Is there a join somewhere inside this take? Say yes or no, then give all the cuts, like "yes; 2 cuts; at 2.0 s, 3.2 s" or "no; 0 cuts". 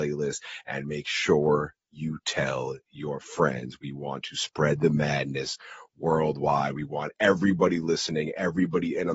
no; 0 cuts